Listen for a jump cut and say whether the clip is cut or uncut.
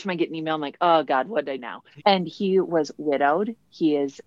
cut